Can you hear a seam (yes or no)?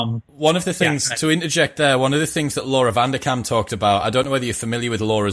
no